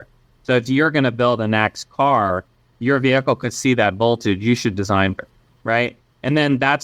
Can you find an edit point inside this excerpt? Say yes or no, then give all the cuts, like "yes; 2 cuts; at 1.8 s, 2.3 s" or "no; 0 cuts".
yes; 1 cut; at 5.2 s